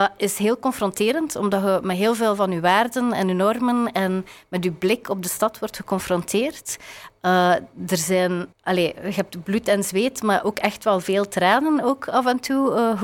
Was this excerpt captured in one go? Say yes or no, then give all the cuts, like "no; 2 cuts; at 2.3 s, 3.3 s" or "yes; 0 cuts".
no; 1 cut; at 8.5 s